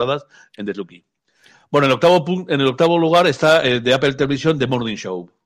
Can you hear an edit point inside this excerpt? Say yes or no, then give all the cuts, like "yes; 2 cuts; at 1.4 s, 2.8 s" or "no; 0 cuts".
no; 0 cuts